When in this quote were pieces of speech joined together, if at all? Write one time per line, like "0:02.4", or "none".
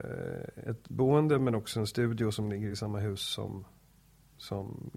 none